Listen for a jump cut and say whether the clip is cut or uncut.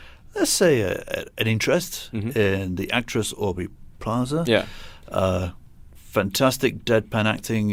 uncut